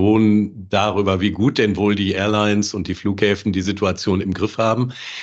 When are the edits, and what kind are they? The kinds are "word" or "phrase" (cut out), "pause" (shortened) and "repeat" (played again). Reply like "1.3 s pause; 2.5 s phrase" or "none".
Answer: none